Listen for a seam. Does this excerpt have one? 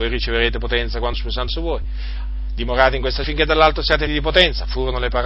yes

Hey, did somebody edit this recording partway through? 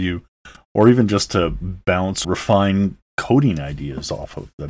yes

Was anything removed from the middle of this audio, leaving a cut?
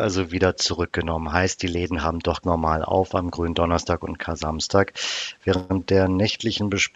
yes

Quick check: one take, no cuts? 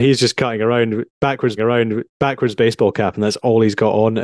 no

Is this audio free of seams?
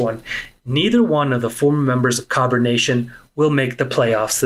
yes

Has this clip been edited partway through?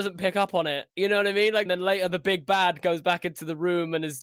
yes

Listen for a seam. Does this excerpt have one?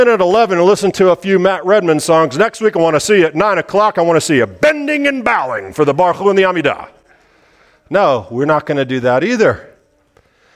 no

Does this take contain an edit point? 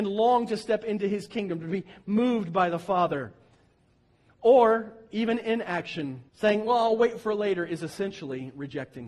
yes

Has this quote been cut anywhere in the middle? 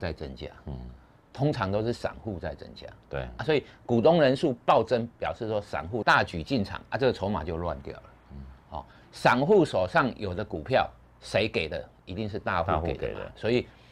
no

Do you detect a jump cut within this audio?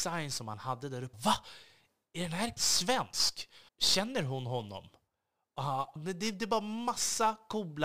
yes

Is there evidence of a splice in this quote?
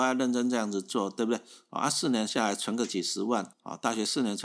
yes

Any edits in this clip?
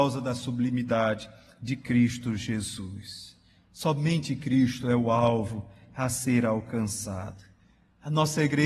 no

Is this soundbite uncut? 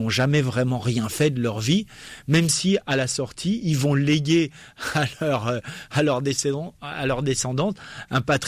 yes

